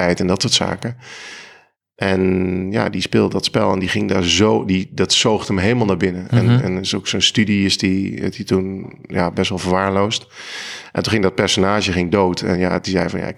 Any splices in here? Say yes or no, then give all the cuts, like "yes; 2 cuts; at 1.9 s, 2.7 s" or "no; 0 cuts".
no; 0 cuts